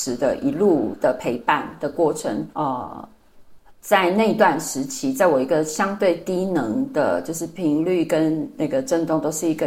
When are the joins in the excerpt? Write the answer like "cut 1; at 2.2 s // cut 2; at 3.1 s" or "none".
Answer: cut 1; at 2.5 s